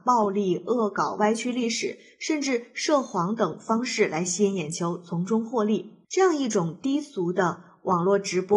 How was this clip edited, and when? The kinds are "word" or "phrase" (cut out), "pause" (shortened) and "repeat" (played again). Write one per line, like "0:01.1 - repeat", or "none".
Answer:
0:06.0 - pause